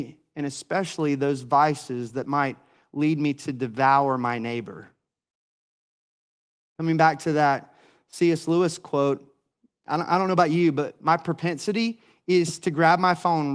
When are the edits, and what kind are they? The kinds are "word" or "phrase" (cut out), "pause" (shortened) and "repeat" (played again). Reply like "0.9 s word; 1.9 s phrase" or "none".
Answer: none

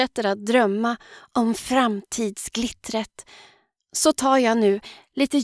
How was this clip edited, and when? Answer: none

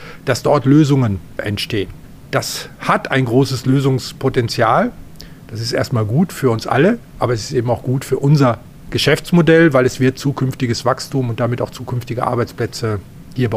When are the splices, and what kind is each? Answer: none

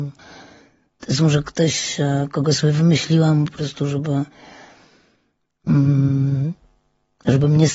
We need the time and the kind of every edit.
none

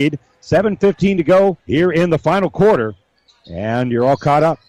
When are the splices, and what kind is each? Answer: 1.6 s pause

